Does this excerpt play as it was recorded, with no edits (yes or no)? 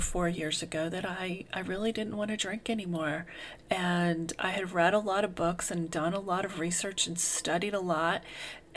yes